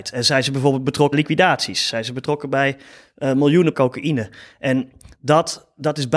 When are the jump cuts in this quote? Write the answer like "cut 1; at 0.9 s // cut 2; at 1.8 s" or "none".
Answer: cut 1; at 1.1 s // cut 2; at 3.7 s